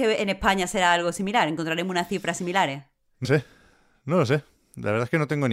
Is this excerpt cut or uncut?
cut